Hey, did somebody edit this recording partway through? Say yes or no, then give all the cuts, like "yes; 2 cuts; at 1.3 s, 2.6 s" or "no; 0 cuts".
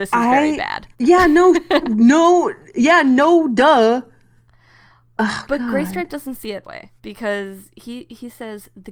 yes; 4 cuts; at 0.9 s, 1.8 s, 6.6 s, 7.0 s